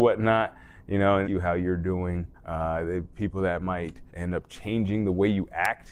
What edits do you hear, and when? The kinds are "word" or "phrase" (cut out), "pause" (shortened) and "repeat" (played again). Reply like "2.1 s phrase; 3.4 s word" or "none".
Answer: 1.2 s phrase; 2.3 s pause; 4.1 s pause